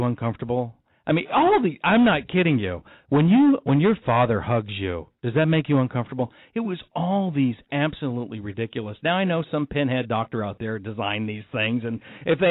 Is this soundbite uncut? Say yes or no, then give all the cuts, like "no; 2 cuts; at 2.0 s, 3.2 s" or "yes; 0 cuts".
yes; 0 cuts